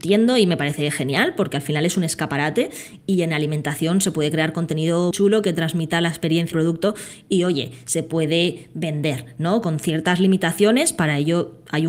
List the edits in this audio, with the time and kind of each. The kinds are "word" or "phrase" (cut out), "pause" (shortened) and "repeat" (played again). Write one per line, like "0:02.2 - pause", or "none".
0:05.1 - word
0:06.5 - word